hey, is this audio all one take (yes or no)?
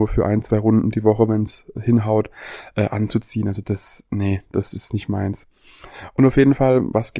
yes